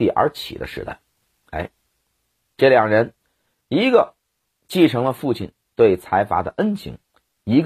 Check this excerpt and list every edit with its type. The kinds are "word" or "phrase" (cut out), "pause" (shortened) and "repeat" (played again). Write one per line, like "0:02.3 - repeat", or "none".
none